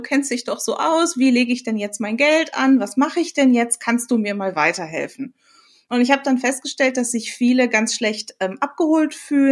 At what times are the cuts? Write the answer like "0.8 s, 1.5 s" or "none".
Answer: none